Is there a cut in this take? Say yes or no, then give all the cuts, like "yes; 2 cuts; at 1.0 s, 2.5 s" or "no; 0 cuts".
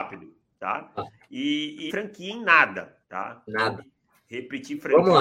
yes; 3 cuts; at 1.9 s, 3.0 s, 3.8 s